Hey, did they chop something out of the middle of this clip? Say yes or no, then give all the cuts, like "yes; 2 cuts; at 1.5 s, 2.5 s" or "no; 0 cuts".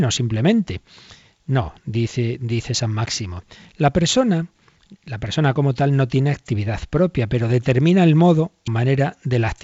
yes; 1 cut; at 8.7 s